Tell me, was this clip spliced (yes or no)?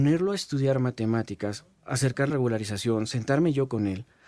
yes